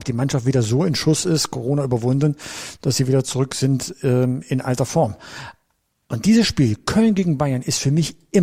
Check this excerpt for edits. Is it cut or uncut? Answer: uncut